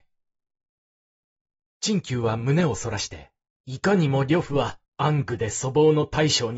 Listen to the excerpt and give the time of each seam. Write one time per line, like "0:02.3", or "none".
0:03.5
0:04.8